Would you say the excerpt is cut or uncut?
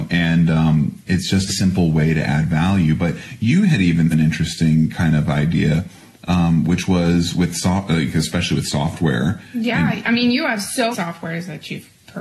cut